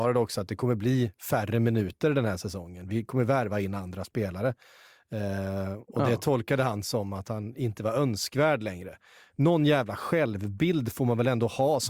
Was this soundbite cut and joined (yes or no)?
no